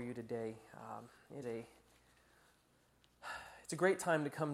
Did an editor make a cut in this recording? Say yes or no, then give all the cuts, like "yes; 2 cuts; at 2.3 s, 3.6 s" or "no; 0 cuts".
yes; 1 cut; at 1.4 s